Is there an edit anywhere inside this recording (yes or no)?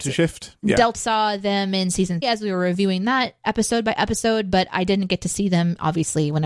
yes